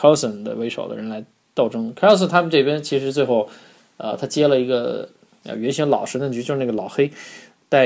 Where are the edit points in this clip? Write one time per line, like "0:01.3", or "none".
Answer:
none